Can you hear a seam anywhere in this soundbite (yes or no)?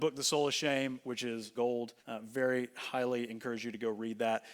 yes